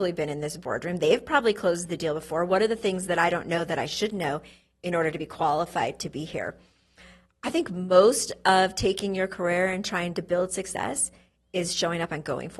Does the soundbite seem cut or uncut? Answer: uncut